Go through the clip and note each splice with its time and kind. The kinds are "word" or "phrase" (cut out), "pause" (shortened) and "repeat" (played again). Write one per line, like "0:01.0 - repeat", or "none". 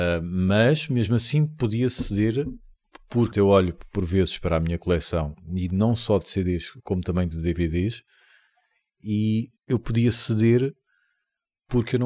0:03.3 - word
0:09.6 - pause